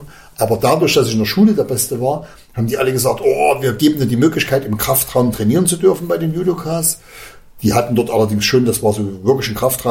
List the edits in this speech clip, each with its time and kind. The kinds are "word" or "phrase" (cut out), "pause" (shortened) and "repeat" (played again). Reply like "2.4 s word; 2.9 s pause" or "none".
none